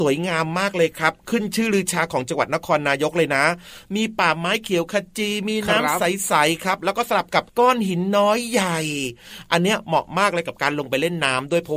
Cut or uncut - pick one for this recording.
cut